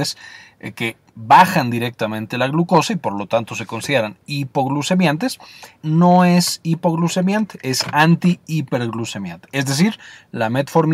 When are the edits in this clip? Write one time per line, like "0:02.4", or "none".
0:05.8